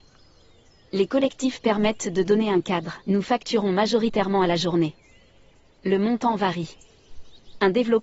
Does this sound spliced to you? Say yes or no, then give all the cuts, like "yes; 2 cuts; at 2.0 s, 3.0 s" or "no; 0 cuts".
yes; 1 cut; at 3.0 s